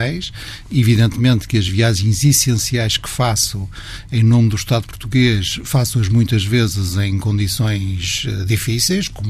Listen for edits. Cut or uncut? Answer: uncut